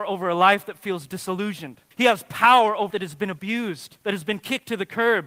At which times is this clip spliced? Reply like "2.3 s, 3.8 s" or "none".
1.9 s, 2.9 s, 4.0 s